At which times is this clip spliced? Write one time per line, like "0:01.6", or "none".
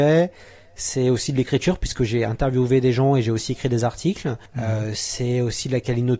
0:04.5